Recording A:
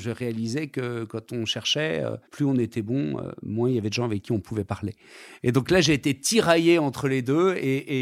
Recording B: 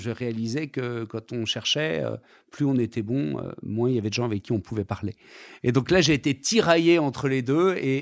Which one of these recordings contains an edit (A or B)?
A